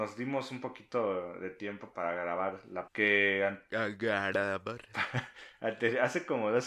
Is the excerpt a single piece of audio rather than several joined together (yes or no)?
no